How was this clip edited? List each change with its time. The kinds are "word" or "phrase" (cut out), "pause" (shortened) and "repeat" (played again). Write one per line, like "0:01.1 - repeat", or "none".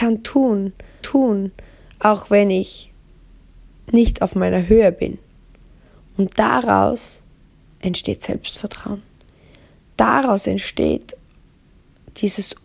0:01.0 - repeat

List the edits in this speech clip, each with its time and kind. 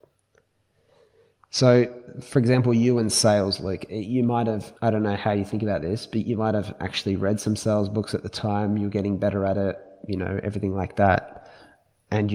none

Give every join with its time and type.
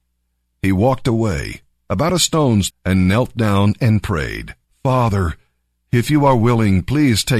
0:02.7 - word
0:04.6 - pause

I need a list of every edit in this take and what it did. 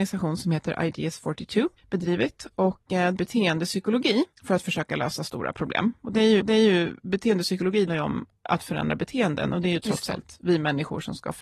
0:01.8 - pause
0:03.2 - phrase
0:04.3 - pause
0:06.4 - repeat
0:07.9 - word
0:08.3 - pause

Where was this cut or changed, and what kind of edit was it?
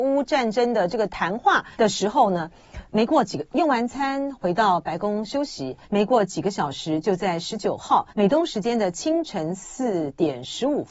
0:01.7 - pause
0:02.9 - pause
0:05.8 - pause
0:08.1 - pause

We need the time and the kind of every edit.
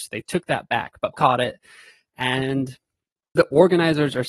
0:01.1 - word
0:03.4 - word

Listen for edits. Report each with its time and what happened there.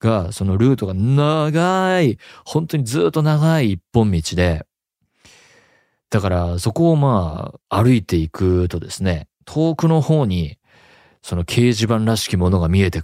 0:07.6 - pause
0:09.3 - pause

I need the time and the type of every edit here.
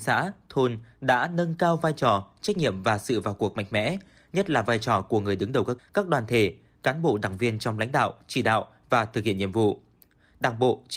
0:05.8 - word

